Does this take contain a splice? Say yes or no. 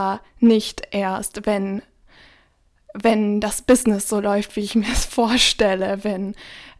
no